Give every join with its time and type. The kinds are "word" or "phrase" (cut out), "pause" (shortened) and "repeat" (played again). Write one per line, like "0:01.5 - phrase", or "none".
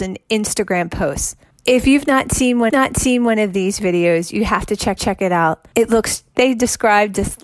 0:02.7 - repeat
0:05.0 - repeat
0:06.3 - word